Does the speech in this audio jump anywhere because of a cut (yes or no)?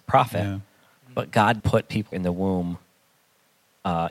yes